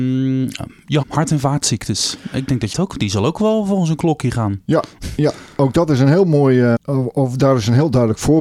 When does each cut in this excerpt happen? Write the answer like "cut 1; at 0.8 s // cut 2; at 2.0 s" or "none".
cut 1; at 1.0 s // cut 2; at 2.7 s // cut 3; at 6.8 s

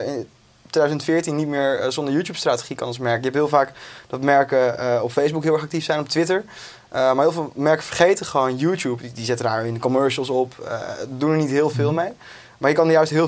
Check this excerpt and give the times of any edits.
none

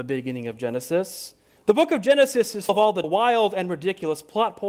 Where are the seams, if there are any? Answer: cut 1; at 1.6 s // cut 2; at 2.7 s // cut 3; at 3.0 s

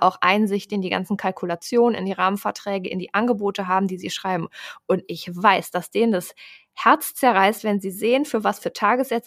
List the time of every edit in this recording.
none

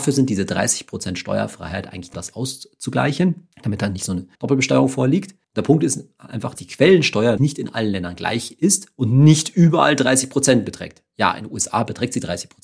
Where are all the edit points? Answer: cut 1; at 2.1 s // cut 2; at 3.5 s // cut 3; at 4.3 s // cut 4; at 5.4 s // cut 5; at 6.5 s // cut 6; at 7.4 s

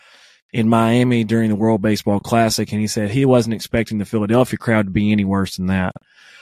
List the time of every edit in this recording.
none

